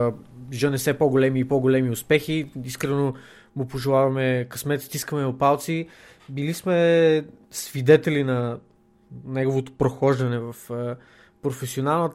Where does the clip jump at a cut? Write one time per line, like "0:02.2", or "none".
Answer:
none

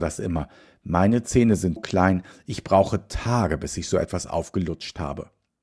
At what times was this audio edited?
0:01.8

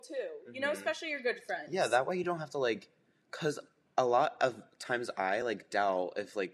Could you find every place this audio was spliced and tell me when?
none

